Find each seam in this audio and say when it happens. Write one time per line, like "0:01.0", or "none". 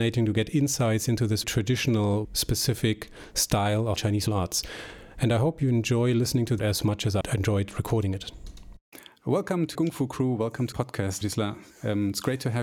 0:01.4
0:02.2
0:04.0
0:04.3
0:06.6
0:07.2
0:09.8
0:10.7
0:11.2